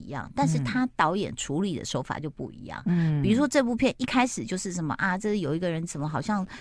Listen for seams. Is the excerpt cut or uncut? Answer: uncut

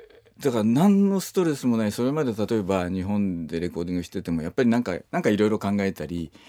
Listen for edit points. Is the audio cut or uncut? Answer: cut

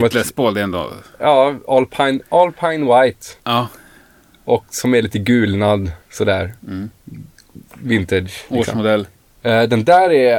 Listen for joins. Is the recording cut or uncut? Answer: cut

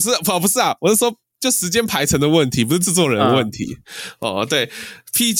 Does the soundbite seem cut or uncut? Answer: uncut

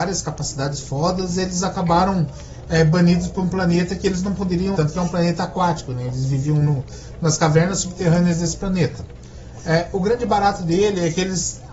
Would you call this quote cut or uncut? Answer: cut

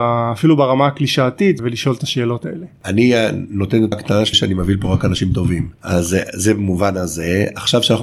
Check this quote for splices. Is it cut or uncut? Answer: cut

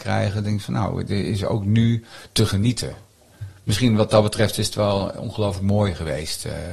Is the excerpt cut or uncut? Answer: uncut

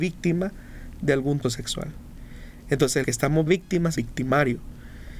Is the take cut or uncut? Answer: cut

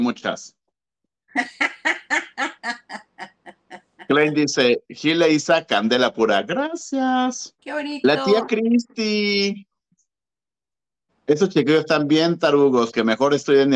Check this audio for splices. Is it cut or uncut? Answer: cut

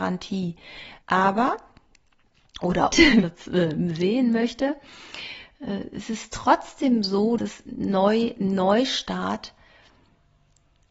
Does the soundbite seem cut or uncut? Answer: cut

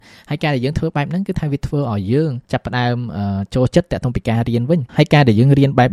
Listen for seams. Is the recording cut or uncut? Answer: cut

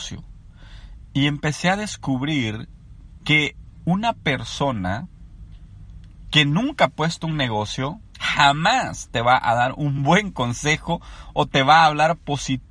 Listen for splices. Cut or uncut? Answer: uncut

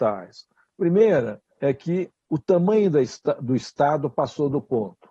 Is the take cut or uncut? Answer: cut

